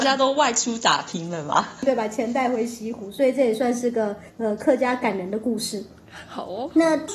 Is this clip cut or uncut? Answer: cut